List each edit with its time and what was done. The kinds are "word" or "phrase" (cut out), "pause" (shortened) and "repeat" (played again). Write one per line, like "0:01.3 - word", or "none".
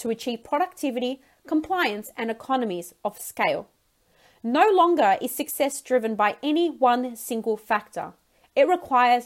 none